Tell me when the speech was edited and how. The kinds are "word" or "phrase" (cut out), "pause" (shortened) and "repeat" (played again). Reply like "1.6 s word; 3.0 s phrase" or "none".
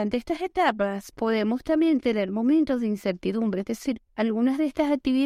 4.1 s pause

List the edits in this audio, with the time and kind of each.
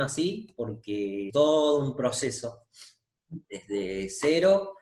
1.3 s word; 3.4 s pause

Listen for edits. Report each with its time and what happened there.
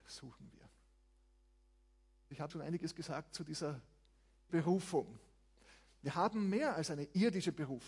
2.5 s word; 4.5 s word

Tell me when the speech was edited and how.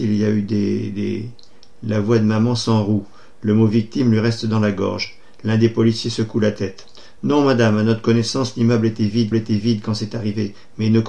9.3 s repeat

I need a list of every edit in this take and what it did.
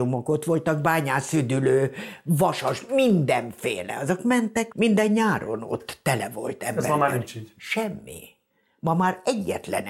4.7 s word

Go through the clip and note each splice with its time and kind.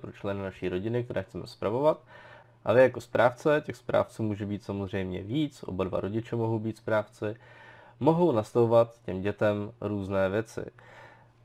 none

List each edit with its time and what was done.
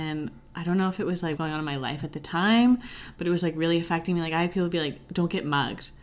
1.4 s phrase

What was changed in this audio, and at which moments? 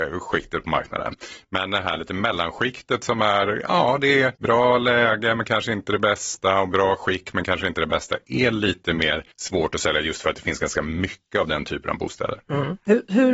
4.4 s pause; 9.3 s pause

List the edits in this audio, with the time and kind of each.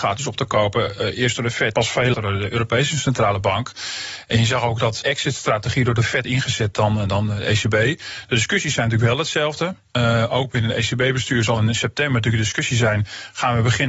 1.7 s word; 2.1 s word; 5.0 s word; 6.2 s phrase

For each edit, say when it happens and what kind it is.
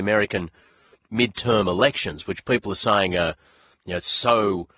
none

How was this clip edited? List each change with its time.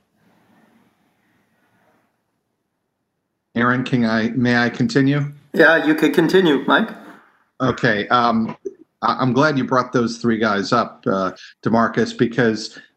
none

